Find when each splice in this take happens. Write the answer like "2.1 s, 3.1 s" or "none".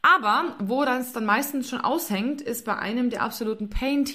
none

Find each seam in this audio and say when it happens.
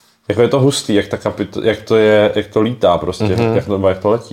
none

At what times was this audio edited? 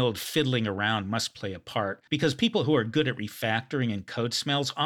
2.1 s

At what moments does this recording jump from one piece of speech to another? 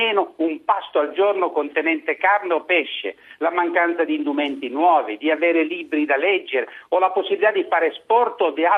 none

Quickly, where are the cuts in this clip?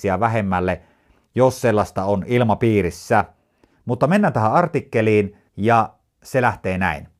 5.5 s

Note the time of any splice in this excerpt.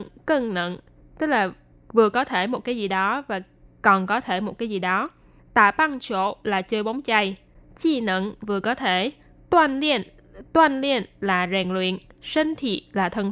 none

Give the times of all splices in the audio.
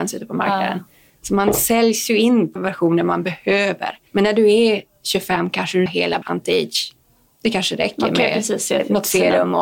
2.6 s, 4.1 s, 5.9 s, 6.2 s

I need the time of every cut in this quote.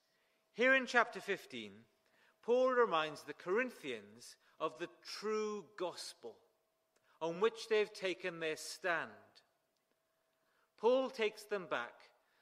none

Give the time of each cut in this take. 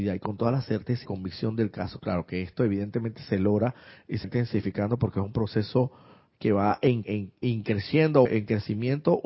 1.1 s, 4.2 s, 7.0 s, 8.3 s

